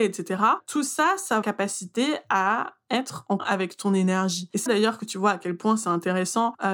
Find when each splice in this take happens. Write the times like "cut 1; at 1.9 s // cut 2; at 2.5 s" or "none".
cut 1; at 1.4 s // cut 2; at 3.4 s // cut 3; at 4.7 s